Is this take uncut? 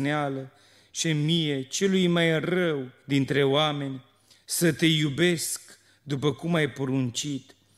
no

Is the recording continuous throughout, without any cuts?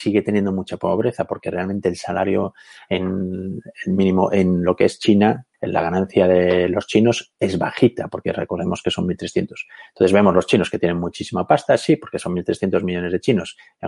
no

